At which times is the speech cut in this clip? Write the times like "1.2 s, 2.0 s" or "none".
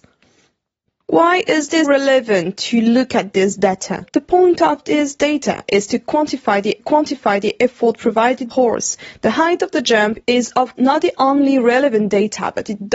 1.8 s, 4.1 s, 6.8 s, 8.5 s, 10.8 s